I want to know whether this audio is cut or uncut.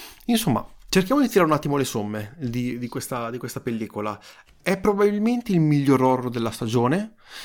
uncut